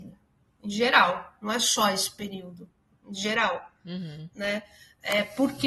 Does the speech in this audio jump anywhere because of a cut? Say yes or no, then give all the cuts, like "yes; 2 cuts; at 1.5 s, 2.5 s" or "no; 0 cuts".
no; 0 cuts